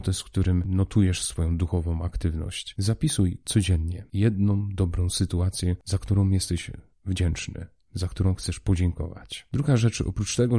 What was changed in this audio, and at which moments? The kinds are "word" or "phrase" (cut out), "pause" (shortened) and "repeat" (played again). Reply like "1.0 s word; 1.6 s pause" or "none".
none